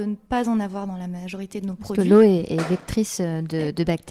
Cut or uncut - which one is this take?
uncut